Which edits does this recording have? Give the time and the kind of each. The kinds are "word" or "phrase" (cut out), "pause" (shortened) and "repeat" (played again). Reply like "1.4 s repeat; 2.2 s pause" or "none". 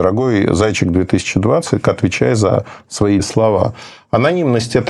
1.8 s word; 3.2 s word